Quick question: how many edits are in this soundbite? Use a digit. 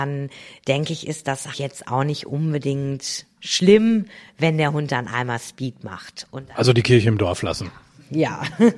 1